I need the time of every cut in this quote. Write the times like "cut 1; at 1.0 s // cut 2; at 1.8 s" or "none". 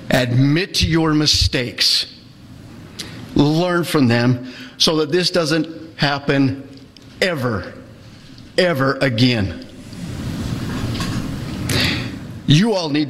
none

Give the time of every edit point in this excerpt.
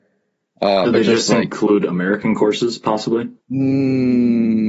cut 1; at 3.4 s

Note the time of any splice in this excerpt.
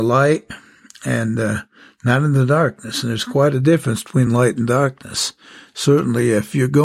none

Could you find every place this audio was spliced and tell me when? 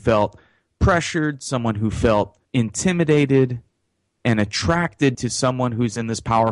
cut 1; at 2.4 s // cut 2; at 5.1 s

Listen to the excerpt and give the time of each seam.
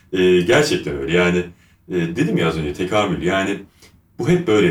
none

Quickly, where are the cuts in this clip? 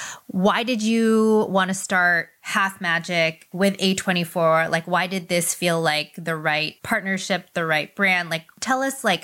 cut 1; at 6.8 s

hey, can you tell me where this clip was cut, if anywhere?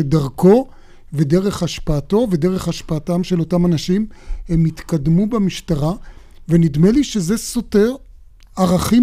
none

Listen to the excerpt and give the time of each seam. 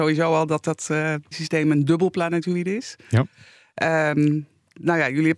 cut 1; at 1.3 s

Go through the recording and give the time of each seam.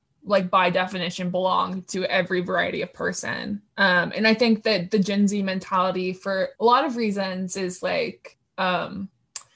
cut 1; at 3.7 s // cut 2; at 6.6 s

